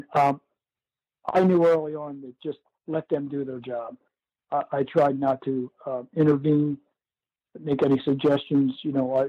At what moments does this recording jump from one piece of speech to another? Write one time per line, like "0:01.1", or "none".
none